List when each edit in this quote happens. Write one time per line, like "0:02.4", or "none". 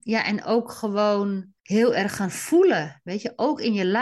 0:01.6